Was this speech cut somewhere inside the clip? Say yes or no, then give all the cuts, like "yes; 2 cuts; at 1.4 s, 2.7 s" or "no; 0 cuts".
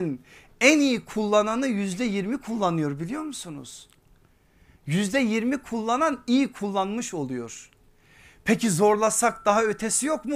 no; 0 cuts